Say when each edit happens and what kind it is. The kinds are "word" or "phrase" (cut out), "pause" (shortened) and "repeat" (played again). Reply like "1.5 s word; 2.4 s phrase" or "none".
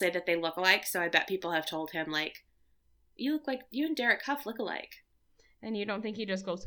none